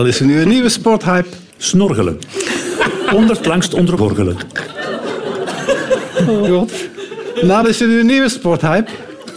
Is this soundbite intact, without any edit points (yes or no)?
no